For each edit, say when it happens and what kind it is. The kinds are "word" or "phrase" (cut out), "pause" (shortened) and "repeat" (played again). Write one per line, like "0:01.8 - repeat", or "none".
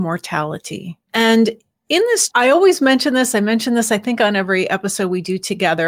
0:01.0 - pause
0:02.3 - phrase